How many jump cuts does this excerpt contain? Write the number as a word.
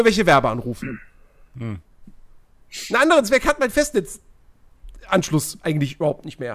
zero